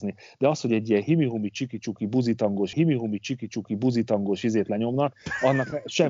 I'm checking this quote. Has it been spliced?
yes; 1 cut; at 2.7 s

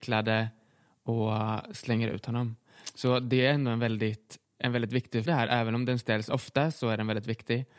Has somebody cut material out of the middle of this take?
yes; 2 cuts; at 4.4 s, 5.3 s

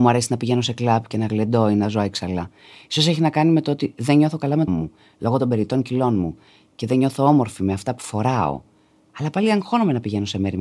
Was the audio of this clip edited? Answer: yes; 1 cut; at 4.7 s

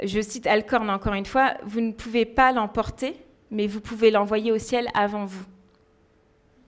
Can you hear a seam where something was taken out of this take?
no; 0 cuts

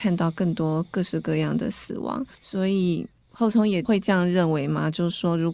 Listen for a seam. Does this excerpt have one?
yes; 1 cut; at 2.3 s

